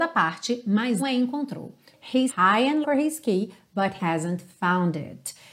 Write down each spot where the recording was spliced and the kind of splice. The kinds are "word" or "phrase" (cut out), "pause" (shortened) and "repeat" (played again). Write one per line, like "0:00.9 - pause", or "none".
0:01.0 - word
0:02.3 - word
0:02.8 - word
0:04.0 - word